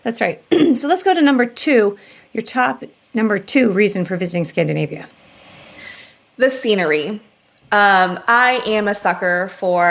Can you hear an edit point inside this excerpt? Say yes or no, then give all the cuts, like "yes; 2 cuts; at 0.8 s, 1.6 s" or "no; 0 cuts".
no; 0 cuts